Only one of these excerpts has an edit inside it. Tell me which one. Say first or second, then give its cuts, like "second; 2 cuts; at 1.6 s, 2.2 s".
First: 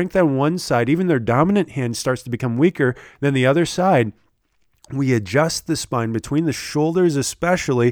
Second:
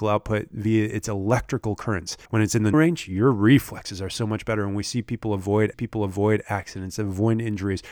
second; 3 cuts; at 2.2 s, 2.7 s, 5.7 s